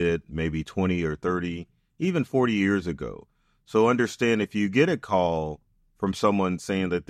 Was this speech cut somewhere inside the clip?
no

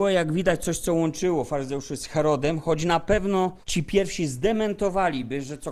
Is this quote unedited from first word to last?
no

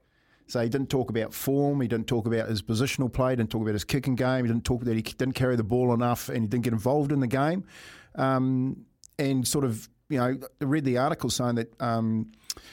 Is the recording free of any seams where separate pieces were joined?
yes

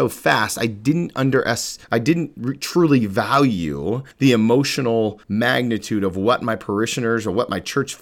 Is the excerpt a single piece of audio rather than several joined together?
no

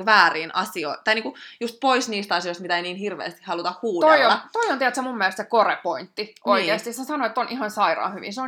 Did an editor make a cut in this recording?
no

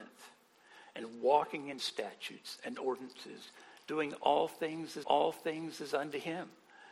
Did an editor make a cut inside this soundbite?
yes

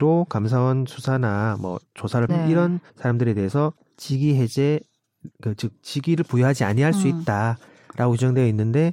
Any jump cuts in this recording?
yes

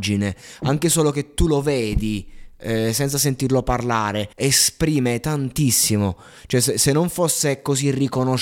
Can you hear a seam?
yes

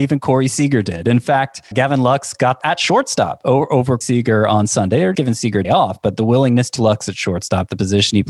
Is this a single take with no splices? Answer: no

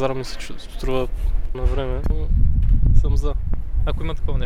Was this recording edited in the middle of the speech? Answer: yes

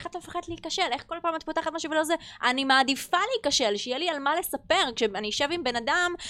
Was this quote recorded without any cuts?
yes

